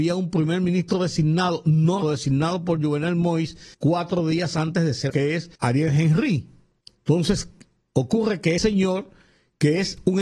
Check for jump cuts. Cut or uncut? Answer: cut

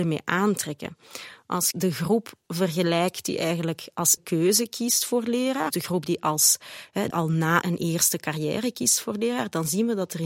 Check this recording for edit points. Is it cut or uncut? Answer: cut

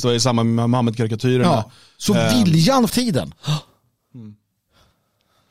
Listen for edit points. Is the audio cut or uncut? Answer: cut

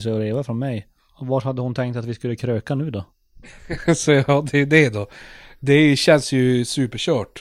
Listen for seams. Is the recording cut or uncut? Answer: uncut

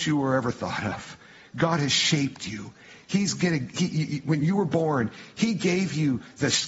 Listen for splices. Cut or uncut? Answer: uncut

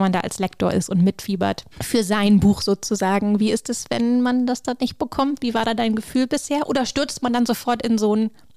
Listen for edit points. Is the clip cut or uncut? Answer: cut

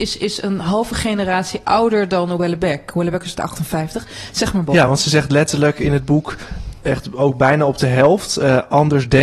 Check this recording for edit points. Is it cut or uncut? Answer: uncut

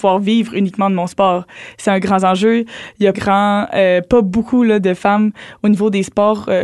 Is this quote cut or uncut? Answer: cut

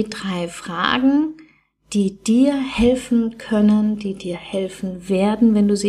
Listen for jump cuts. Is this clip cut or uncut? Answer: uncut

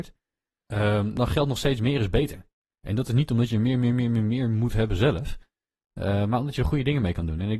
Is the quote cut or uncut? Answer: uncut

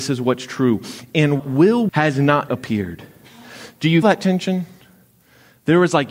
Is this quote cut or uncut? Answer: cut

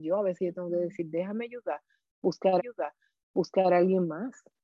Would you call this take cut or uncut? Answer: cut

